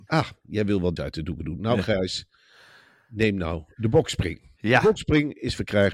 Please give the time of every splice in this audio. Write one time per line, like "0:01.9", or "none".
0:01.0